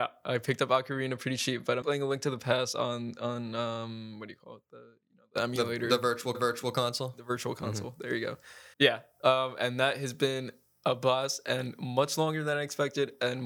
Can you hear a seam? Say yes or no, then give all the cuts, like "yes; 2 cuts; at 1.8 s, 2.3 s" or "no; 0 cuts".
yes; 3 cuts; at 1.8 s, 6.3 s, 8.7 s